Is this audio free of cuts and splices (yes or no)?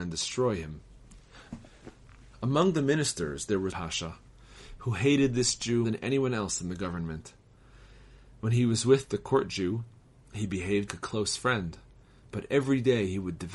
no